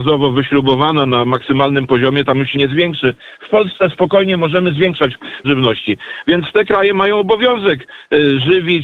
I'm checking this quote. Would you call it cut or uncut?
cut